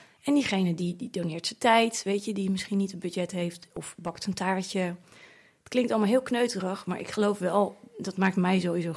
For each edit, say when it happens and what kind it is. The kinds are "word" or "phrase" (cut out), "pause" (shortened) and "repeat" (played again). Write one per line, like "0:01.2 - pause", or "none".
none